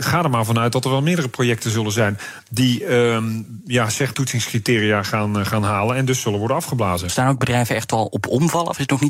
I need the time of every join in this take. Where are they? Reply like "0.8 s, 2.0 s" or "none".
4.1 s